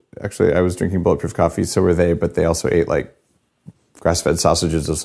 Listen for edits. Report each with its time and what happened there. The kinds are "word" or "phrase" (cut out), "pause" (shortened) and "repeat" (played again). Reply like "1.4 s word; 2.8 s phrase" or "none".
none